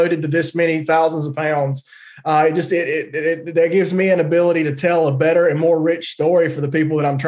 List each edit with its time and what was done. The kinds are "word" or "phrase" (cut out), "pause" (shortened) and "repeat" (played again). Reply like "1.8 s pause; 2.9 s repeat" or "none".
none